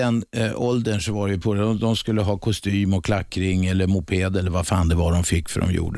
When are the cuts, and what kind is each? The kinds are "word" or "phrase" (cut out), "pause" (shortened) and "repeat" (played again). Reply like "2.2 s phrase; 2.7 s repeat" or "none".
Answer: 1.4 s word